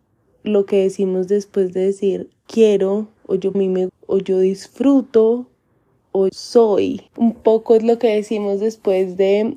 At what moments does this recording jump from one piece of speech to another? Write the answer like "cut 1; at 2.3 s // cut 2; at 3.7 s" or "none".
cut 1; at 2.5 s // cut 2; at 3.2 s // cut 3; at 3.5 s // cut 4; at 3.9 s // cut 5; at 6.3 s // cut 6; at 7.1 s